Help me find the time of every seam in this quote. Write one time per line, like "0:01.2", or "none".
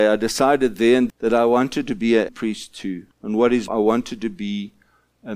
0:01.1
0:02.3
0:03.1
0:03.7